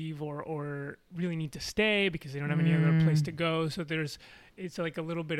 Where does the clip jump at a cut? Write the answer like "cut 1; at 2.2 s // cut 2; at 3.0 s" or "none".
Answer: none